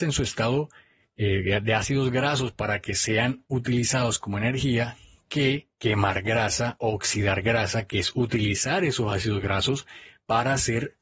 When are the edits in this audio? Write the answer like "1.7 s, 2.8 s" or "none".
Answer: none